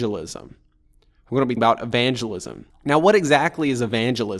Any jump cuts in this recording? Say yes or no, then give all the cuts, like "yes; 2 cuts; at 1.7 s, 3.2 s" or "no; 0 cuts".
yes; 2 cuts; at 1.6 s, 2.7 s